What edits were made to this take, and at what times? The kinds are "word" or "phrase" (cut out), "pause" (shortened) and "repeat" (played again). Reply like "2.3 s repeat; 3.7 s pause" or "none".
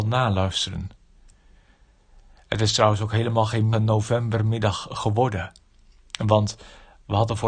3.7 s word